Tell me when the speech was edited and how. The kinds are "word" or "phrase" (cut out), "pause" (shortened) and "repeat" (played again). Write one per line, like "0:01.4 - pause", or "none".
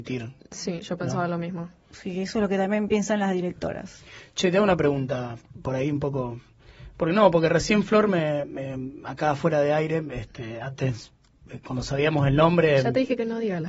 none